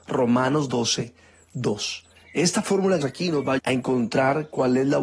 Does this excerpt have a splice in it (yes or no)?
yes